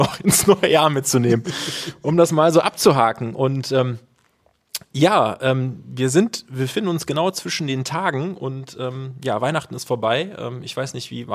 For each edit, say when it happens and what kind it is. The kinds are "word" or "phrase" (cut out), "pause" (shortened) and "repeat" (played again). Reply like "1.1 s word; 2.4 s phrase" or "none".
none